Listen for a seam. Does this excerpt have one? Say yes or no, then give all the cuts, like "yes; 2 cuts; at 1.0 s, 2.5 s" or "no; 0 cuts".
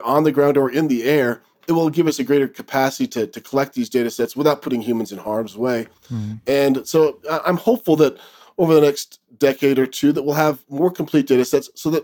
no; 0 cuts